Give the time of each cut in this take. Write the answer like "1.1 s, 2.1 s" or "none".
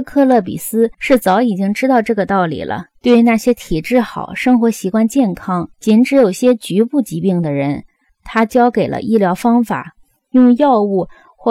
0.9 s, 2.9 s, 5.7 s